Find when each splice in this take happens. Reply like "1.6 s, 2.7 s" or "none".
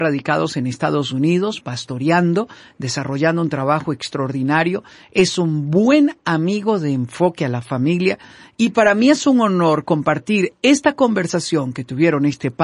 none